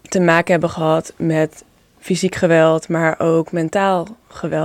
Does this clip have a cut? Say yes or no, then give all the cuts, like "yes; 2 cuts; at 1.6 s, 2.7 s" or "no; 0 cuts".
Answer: no; 0 cuts